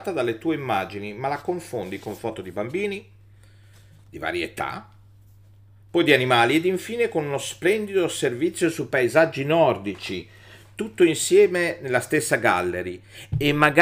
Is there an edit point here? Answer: no; 0 cuts

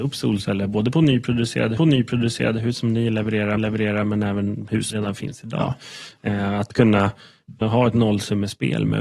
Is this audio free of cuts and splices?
no; 4 cuts; at 1.8 s, 3.6 s, 4.9 s, 7.6 s

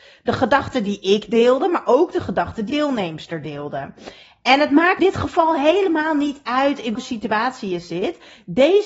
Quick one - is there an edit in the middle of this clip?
yes; 3 cuts; at 2.7 s, 5.0 s, 6.9 s

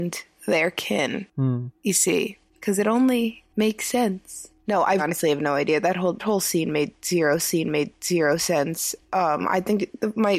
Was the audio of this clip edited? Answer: yes; 4 cuts; at 1.8 s, 5.0 s, 6.2 s, 7.4 s

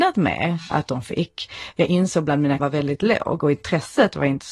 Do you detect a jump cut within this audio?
yes; 1 cut; at 2.6 s

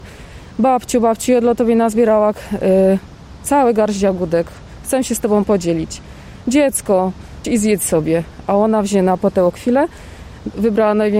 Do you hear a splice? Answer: yes; 1 cut; at 7.4 s

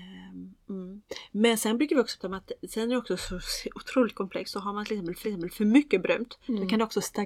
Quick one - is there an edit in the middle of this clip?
yes; 2 cuts; at 2.2 s, 5.2 s

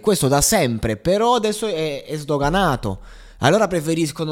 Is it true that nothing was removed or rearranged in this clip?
no; 1 cut; at 3.3 s

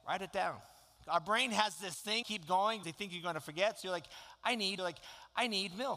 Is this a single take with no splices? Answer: no; 3 cuts; at 2.2 s, 2.8 s, 4.8 s

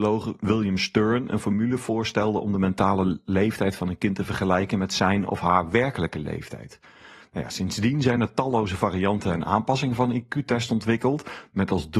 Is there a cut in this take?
no; 0 cuts

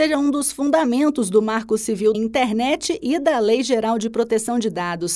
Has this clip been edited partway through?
yes; 1 cut; at 2.1 s

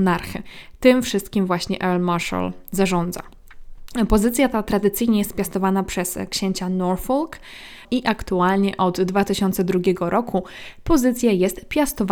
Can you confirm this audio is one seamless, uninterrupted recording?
no; 1 cut; at 7.8 s

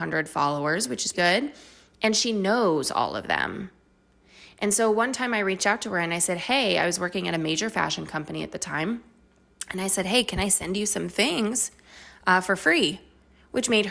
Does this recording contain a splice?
yes; 1 cut; at 1.1 s

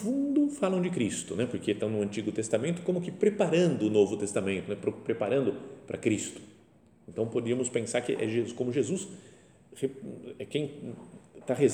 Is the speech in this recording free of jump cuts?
yes; 0 cuts

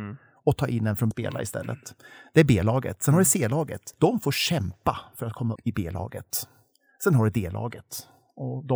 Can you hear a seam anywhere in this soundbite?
yes; 3 cuts; at 1.1 s, 3.9 s, 5.6 s

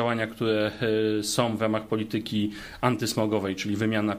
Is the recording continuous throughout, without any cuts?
yes; 0 cuts

